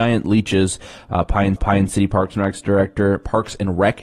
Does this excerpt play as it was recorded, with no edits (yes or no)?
no